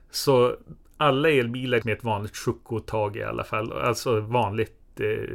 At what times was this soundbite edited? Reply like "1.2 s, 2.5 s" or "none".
1.8 s